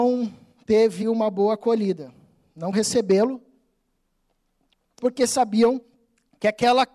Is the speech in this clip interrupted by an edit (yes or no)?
yes